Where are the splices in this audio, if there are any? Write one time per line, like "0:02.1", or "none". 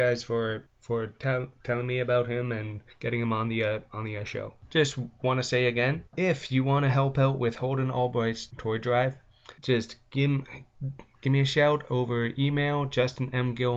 0:02.9
0:06.1
0:09.6